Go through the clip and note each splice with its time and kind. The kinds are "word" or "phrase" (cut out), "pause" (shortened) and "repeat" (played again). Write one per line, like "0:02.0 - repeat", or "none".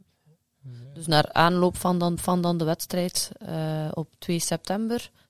0:01.3 - word
0:02.2 - repeat